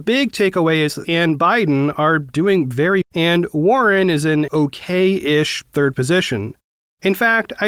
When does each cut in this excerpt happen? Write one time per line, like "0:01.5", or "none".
0:01.0
0:03.0
0:04.5
0:05.9